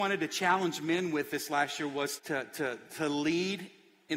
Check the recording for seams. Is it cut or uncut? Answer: cut